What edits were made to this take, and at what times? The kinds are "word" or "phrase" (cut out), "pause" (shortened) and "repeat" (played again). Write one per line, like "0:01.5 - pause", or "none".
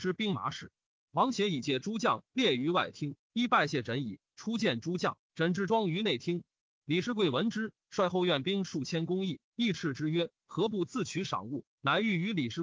0:09.4 - pause